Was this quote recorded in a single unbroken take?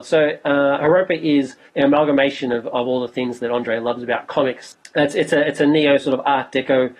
no; 1 cut; at 1.7 s

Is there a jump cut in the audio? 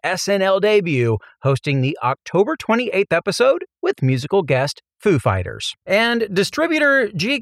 yes; 1 cut; at 5.8 s

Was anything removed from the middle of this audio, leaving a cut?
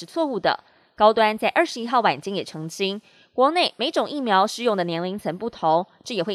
no; 0 cuts

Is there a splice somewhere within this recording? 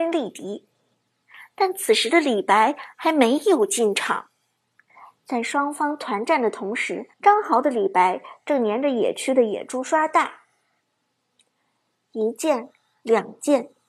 yes; 1 cut; at 7.1 s

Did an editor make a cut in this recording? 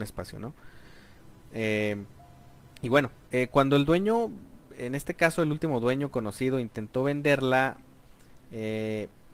no; 0 cuts

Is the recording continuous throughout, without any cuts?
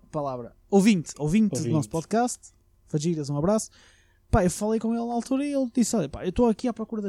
yes; 0 cuts

